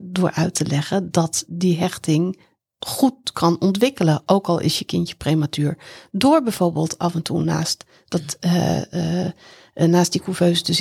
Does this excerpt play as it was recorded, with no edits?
yes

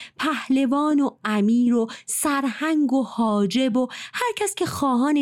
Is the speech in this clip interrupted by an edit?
no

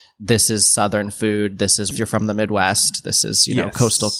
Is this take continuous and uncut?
no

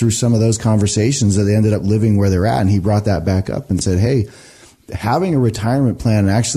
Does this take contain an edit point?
no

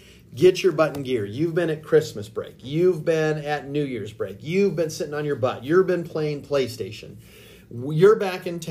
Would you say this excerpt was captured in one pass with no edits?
yes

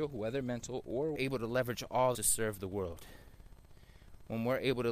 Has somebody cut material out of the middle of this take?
yes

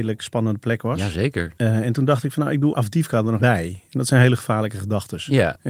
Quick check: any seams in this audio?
yes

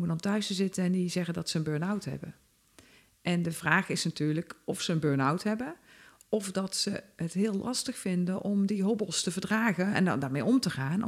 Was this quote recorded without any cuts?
yes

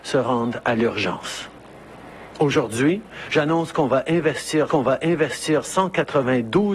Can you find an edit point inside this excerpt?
yes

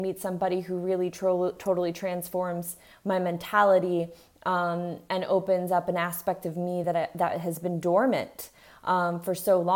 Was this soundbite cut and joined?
no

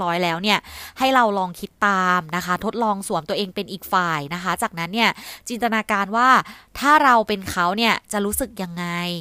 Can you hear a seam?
no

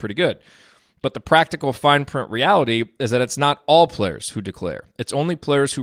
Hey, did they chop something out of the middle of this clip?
no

